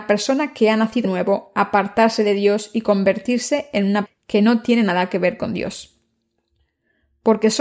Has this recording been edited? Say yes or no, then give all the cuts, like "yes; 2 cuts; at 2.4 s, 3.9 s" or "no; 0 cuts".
yes; 2 cuts; at 1.0 s, 4.1 s